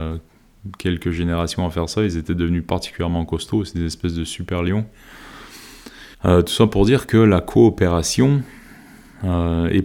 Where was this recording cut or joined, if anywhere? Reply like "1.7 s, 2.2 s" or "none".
6.1 s